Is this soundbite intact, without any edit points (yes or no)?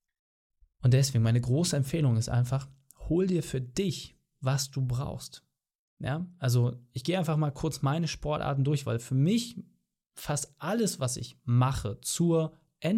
yes